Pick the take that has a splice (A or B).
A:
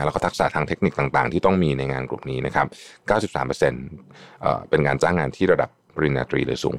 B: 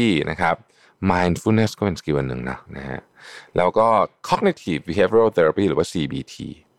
B